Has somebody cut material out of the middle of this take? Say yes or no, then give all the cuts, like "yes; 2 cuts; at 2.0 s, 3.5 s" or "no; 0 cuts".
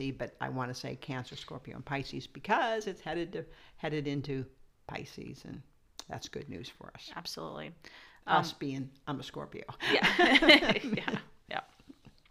no; 0 cuts